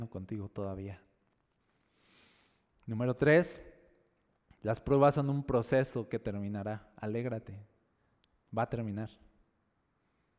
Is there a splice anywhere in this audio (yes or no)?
no